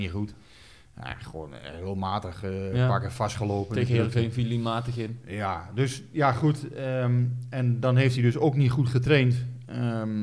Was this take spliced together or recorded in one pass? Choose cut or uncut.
uncut